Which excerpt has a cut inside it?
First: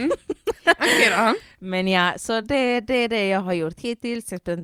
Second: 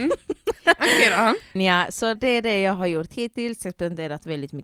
second; 2 cuts; at 1.6 s, 2.2 s

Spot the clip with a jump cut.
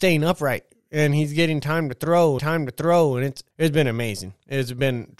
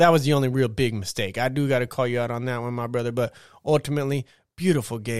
first; 2 cuts; at 2.4 s, 3.5 s

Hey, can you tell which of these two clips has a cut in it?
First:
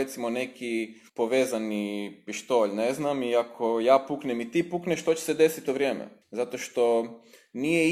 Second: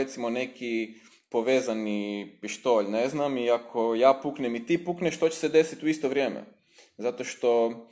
first; 3 cuts; at 1.1 s, 5.7 s, 6.2 s

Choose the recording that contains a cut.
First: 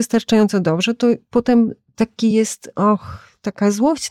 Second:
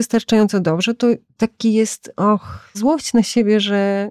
second; 2 cuts; at 1.2 s, 2.7 s

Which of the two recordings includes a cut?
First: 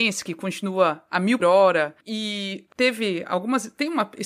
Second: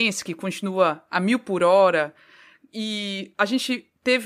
first; 3 cuts; at 1.4 s, 2.0 s, 2.7 s

